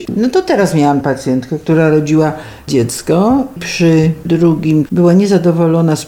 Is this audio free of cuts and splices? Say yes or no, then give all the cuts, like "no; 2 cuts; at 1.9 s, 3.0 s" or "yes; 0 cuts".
no; 5 cuts; at 1.0 s, 2.7 s, 3.6 s, 4.2 s, 4.9 s